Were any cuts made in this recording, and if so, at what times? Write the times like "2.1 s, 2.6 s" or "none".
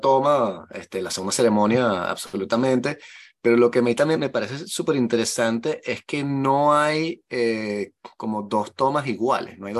4.2 s